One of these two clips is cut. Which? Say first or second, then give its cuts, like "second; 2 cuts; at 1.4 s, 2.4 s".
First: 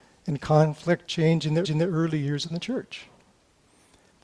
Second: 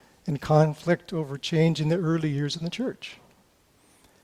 first; 2 cuts; at 1.1 s, 1.6 s